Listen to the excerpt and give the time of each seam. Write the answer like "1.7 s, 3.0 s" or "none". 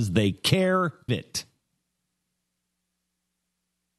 1.1 s